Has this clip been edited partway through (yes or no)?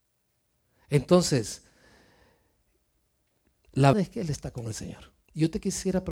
yes